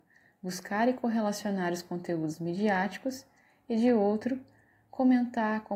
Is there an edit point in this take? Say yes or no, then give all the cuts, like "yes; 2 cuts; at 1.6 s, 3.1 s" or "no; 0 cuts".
no; 0 cuts